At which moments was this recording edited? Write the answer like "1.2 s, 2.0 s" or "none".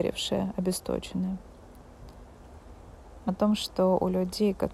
3.3 s